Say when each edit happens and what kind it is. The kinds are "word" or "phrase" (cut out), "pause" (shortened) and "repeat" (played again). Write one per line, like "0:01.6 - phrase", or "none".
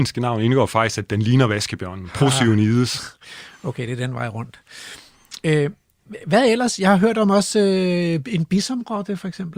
none